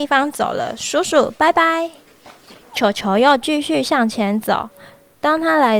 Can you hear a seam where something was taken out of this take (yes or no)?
yes